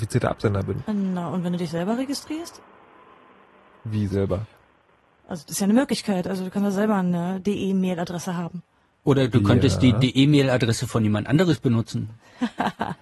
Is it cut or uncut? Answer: uncut